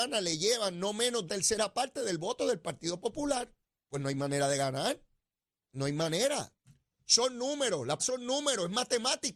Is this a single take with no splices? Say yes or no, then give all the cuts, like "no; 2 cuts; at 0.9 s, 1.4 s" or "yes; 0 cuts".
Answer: no; 2 cuts; at 1.3 s, 8.0 s